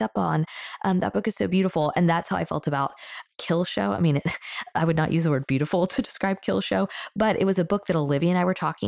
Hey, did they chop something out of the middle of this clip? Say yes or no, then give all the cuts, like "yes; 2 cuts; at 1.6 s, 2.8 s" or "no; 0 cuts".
no; 0 cuts